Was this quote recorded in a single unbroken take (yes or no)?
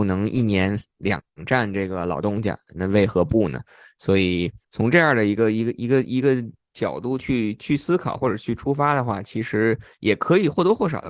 no